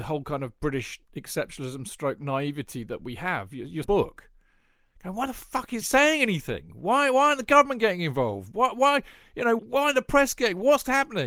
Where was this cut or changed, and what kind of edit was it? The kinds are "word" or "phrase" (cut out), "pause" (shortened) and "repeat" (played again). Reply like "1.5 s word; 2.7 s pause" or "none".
1.0 s pause; 3.8 s phrase; 5.8 s word; 9.6 s word

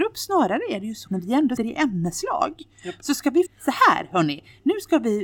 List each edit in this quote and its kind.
1.1 s word; 1.6 s word; 3.5 s word

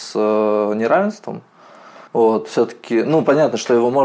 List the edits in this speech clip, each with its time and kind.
2.1 s pause

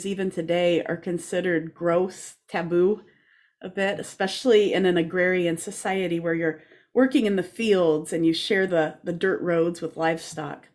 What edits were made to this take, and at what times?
none

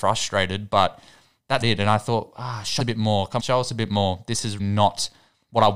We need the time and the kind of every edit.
1.6 s word; 2.8 s word; 3.4 s word; 4.6 s word

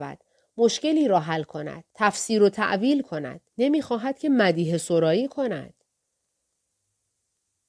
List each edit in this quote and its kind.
1.9 s pause; 3.5 s pause

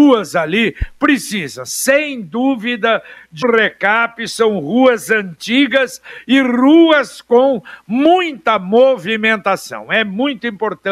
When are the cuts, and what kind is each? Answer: 3.4 s word

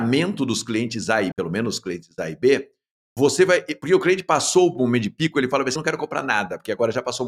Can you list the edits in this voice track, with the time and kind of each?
1.3 s word; 5.8 s word

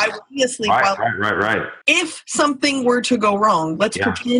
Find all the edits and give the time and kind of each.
1.8 s pause

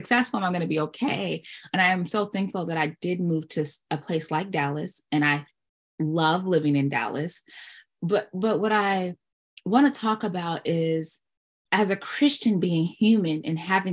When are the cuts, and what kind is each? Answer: none

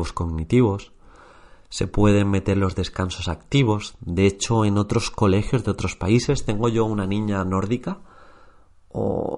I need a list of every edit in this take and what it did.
none

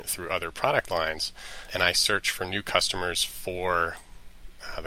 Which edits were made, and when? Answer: none

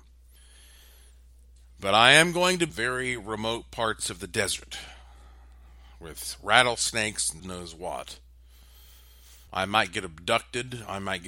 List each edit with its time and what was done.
2.7 s phrase; 7.4 s phrase; 9.5 s pause

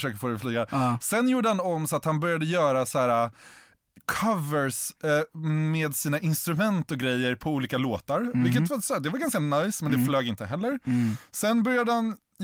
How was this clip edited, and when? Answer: none

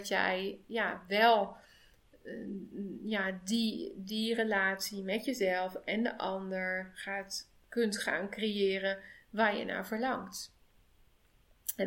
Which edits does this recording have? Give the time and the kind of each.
none

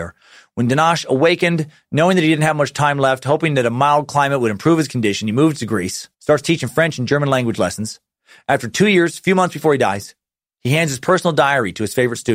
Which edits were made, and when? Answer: 6.1 s pause

